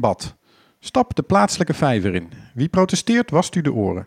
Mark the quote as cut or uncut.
uncut